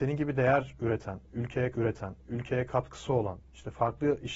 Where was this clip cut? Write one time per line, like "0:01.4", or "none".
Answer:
0:01.7